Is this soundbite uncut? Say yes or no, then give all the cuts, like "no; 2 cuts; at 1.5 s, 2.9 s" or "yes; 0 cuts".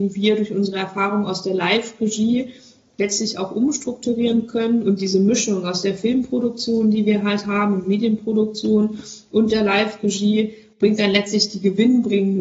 yes; 0 cuts